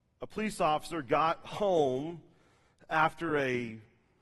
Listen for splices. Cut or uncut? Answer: uncut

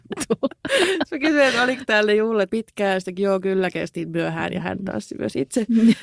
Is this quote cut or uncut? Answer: cut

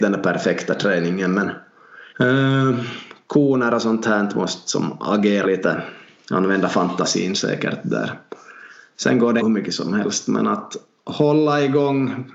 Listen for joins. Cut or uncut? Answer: cut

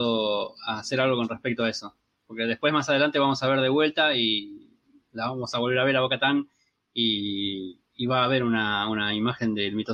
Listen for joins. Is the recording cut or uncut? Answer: uncut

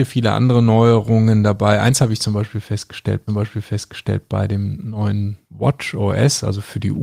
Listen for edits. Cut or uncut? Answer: cut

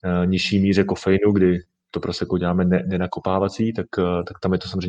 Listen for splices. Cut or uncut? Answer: uncut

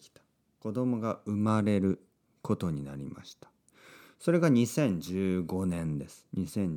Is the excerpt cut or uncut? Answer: uncut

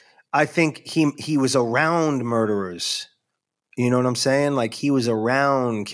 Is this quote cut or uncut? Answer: uncut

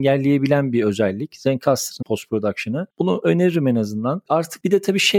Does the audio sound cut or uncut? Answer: cut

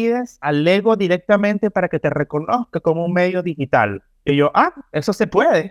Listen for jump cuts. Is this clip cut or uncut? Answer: uncut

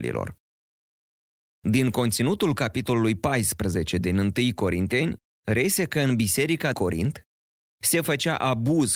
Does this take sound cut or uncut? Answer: cut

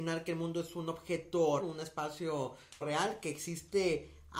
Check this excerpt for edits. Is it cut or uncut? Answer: cut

